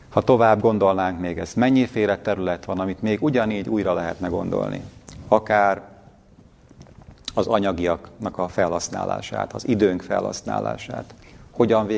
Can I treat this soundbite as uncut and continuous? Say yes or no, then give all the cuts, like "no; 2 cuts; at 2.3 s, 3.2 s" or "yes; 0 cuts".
yes; 0 cuts